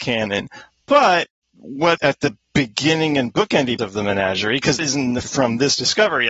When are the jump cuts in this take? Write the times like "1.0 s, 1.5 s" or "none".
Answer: 1.5 s, 2.0 s, 3.8 s, 4.8 s, 5.2 s